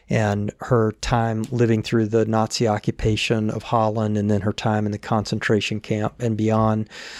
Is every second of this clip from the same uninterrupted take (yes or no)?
yes